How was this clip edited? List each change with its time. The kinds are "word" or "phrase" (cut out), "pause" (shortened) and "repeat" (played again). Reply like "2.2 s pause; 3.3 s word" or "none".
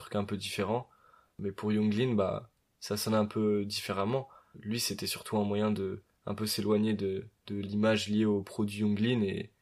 none